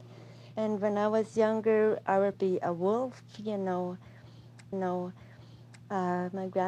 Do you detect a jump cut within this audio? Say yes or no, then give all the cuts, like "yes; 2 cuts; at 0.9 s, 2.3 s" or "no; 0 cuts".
yes; 2 cuts; at 2.3 s, 4.7 s